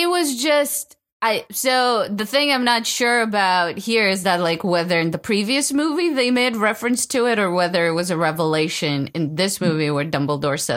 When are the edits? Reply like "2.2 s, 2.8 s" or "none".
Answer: none